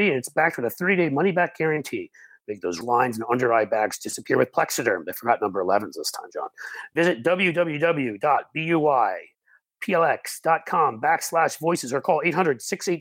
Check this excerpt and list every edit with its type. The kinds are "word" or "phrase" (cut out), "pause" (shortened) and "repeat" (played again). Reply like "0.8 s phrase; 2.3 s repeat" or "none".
2.8 s word